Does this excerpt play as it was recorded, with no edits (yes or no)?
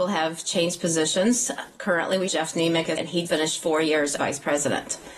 no